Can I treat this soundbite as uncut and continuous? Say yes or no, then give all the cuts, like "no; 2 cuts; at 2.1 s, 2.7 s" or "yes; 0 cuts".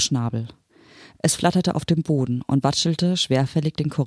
yes; 0 cuts